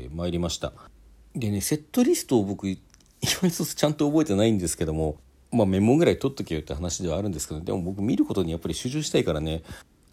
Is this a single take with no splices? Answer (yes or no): yes